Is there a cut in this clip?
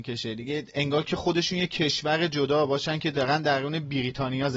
no; 0 cuts

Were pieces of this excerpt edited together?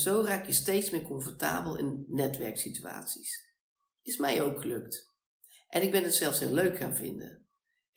no; 0 cuts

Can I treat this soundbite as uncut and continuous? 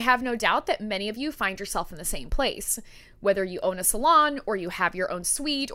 yes; 0 cuts

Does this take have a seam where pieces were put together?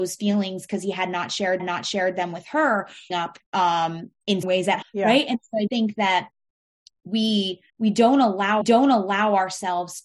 yes; 8 cuts; at 1.6 s, 3.1 s, 3.4 s, 4.4 s, 4.8 s, 5.7 s, 7.7 s, 8.6 s

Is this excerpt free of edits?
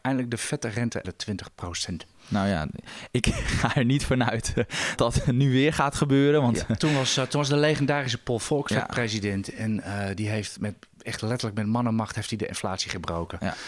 no; 3 cuts; at 1.0 s, 5.0 s, 8.7 s

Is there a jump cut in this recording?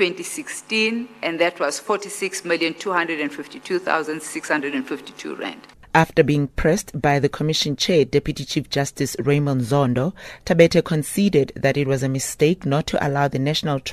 no; 0 cuts

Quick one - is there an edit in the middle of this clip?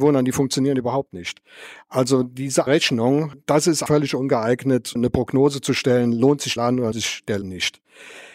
yes; 6 cuts; at 2.7 s, 3.9 s, 5.0 s, 6.6 s, 6.9 s, 7.4 s

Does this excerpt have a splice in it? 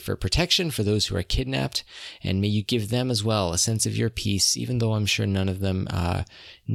no; 0 cuts

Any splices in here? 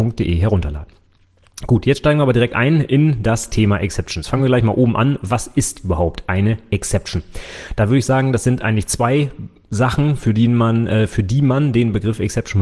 no; 0 cuts

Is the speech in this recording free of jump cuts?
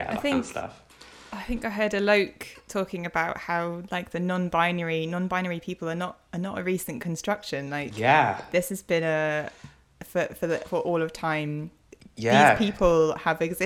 yes; 0 cuts

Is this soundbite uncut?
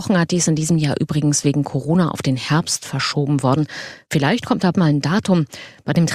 no; 1 cut; at 4.7 s

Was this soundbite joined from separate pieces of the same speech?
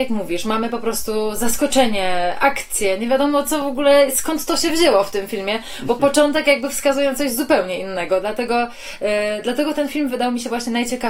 no; 0 cuts

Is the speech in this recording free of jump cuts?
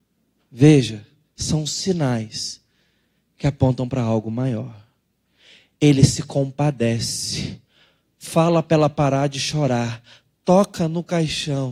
yes; 0 cuts

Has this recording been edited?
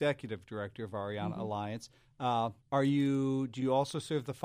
yes; 1 cut; at 2.6 s

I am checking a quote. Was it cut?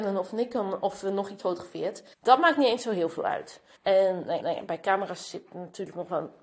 yes; 4 cuts; at 1.4 s, 2.1 s, 3.8 s, 4.4 s

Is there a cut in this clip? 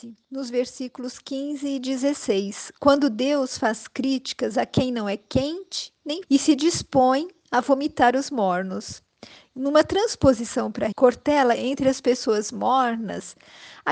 yes; 3 cuts; at 6.2 s, 10.9 s, 11.6 s

